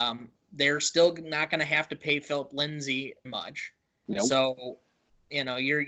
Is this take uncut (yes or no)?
no